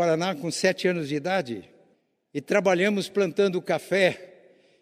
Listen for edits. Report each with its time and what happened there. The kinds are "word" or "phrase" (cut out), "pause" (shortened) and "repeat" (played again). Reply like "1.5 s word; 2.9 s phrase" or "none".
1.9 s pause